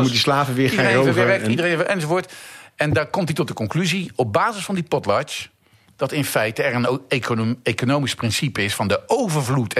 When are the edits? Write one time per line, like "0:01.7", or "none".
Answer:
none

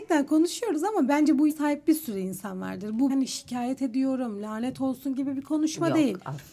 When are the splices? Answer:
0:01.1
0:01.5
0:03.1

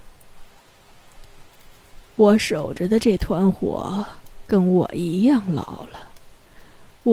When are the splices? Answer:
0:02.1

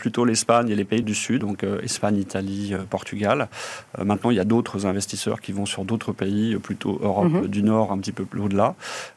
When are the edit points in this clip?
0:01.0
0:01.4
0:07.9

